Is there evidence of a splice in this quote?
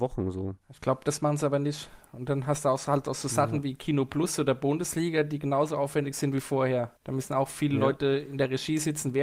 yes; 1 cut; at 7.0 s

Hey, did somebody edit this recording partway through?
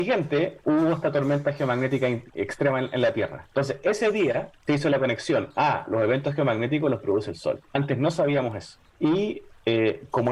yes; 3 cuts; at 4.6 s, 7.7 s, 8.9 s

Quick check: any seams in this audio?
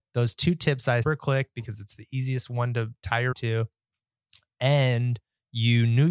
yes; 2 cuts; at 1.0 s, 3.3 s

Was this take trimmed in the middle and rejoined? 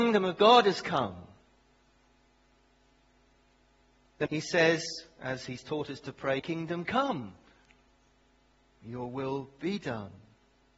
yes; 2 cuts; at 4.3 s, 6.4 s

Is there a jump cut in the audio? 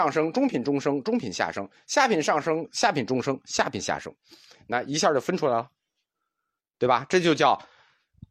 no; 0 cuts

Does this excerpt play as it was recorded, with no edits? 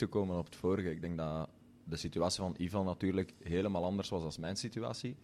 yes; 0 cuts

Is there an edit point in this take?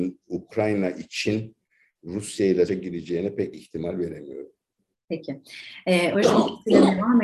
yes; 2 cuts; at 2.7 s, 6.1 s

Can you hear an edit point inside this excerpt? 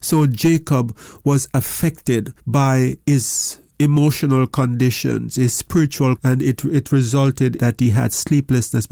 yes; 4 cuts; at 2.4 s, 3.7 s, 6.2 s, 7.6 s

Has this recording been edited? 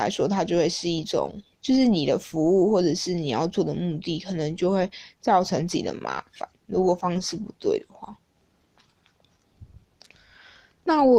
yes; 1 cut; at 1.5 s

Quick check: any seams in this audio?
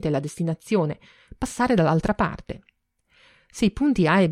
no; 0 cuts

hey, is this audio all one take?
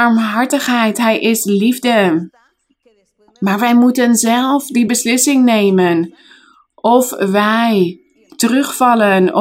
yes; 0 cuts

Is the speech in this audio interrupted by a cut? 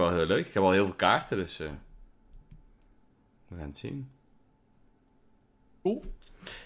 no; 0 cuts

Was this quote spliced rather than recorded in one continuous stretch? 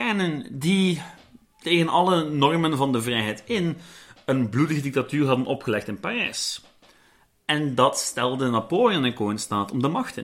no; 0 cuts

